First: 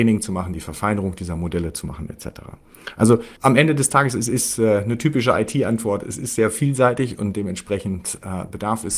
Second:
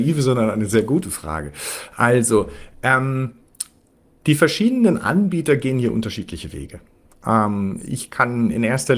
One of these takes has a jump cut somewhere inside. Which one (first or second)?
first